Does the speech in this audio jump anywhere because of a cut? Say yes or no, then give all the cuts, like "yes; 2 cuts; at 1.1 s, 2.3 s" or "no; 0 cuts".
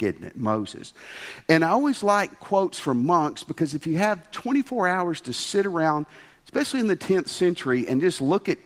no; 0 cuts